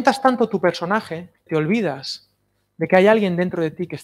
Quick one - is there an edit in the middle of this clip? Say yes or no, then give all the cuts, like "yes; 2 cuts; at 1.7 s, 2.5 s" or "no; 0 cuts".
yes; 1 cut; at 1.5 s